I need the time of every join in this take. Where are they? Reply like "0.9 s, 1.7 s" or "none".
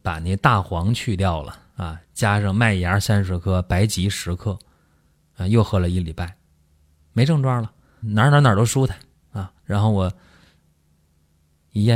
1.7 s, 8.0 s, 9.6 s